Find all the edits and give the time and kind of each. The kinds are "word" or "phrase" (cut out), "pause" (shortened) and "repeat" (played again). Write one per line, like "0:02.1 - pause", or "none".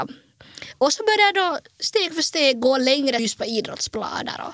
0:03.2 - phrase